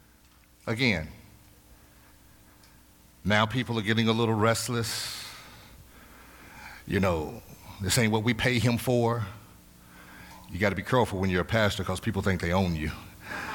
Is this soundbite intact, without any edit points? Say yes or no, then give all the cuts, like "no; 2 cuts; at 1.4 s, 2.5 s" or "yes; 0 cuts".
yes; 0 cuts